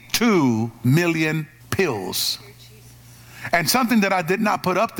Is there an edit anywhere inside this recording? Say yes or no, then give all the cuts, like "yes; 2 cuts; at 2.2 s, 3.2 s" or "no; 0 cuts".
yes; 1 cut; at 1.6 s